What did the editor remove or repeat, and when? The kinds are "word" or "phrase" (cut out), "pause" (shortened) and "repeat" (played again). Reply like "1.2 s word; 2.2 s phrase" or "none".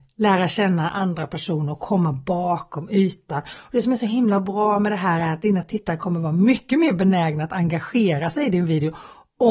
none